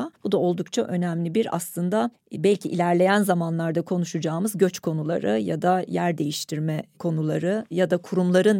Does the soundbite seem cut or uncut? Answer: uncut